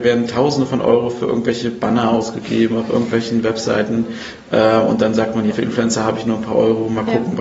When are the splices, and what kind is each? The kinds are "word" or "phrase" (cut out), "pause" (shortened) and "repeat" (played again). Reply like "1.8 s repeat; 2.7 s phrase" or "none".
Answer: 5.5 s word